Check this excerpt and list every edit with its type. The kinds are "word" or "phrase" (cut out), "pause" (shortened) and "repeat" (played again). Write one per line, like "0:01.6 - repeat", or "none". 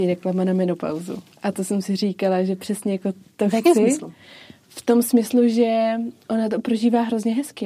none